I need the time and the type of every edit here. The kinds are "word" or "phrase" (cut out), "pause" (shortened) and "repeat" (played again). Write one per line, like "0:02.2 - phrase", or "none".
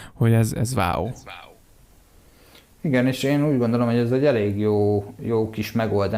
none